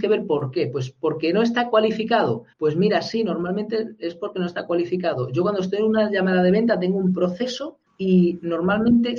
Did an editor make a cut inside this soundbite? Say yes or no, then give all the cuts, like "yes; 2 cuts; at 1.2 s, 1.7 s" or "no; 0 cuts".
yes; 2 cuts; at 2.5 s, 7.9 s